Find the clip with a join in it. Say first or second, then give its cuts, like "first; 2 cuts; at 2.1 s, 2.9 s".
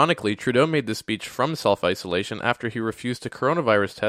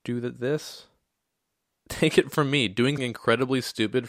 second; 1 cut; at 3.0 s